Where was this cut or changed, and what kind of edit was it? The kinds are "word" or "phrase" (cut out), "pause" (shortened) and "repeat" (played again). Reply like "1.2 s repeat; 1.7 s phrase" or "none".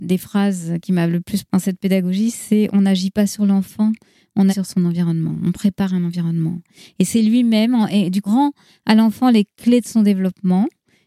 1.5 s word; 4.5 s word; 8.3 s word

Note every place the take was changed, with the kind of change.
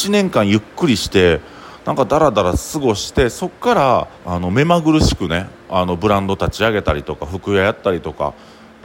4.2 s pause

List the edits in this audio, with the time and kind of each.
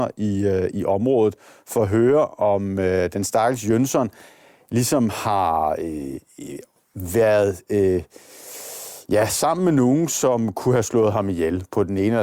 none

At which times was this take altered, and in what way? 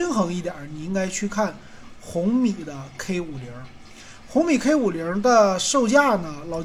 none

